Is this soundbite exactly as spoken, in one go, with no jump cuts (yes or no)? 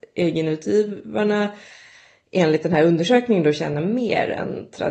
yes